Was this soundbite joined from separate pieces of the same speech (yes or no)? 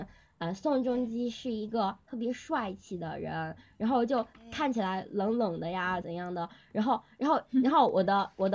yes